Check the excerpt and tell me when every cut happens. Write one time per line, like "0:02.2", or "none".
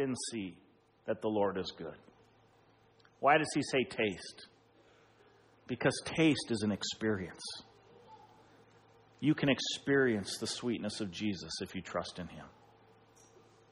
none